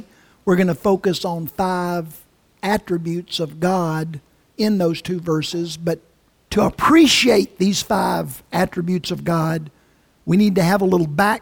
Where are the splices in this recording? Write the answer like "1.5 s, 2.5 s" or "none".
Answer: 6.5 s